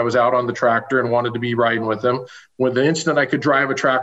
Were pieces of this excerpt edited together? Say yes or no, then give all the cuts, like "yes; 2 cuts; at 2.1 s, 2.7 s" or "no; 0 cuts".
no; 0 cuts